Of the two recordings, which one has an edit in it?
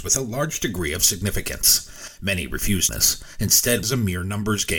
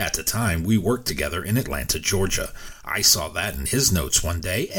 first; 2 cuts; at 2.9 s, 3.8 s

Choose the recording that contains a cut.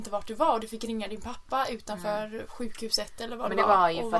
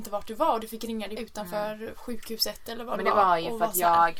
second; 1 cut; at 1.2 s

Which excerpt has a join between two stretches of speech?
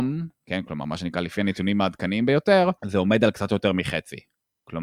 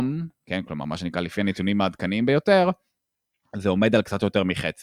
first; 1 cut; at 2.8 s

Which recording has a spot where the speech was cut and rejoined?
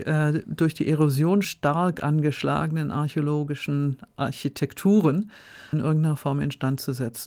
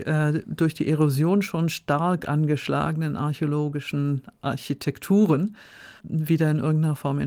first; 2 cuts; at 1.4 s, 5.7 s

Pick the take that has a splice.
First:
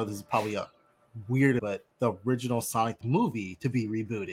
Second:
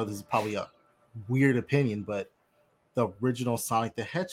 first; 3 cuts; at 1.6 s, 1.9 s, 3.0 s

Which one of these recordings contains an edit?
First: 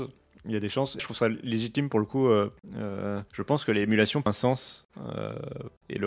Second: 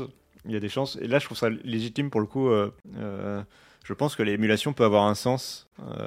first; 3 cuts; at 1.0 s, 3.3 s, 4.3 s

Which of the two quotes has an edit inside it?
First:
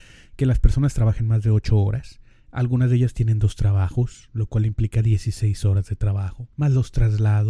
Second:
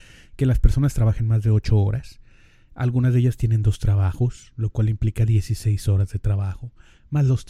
first; 2 cuts; at 2.3 s, 6.5 s

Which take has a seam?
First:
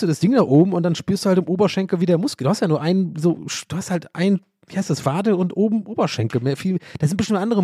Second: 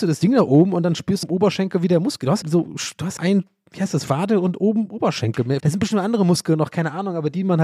second; 4 cuts; at 1.2 s, 2.4 s, 3.2 s, 5.6 s

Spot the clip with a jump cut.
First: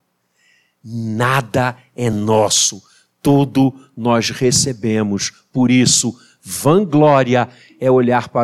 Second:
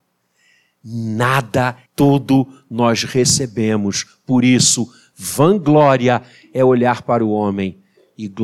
second; 1 cut; at 1.9 s

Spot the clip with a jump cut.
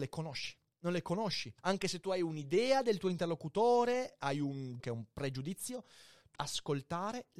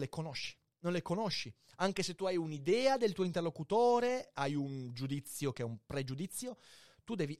first; 3 cuts; at 1.6 s, 4.8 s, 6.3 s

